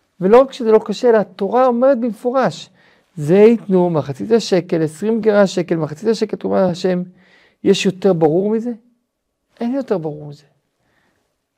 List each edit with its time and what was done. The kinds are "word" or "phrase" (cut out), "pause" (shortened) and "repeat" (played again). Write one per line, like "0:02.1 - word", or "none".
none